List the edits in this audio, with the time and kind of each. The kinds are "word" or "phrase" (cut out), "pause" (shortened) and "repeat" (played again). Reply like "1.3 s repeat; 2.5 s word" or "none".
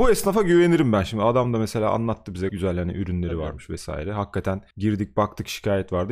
2.5 s word; 4.7 s pause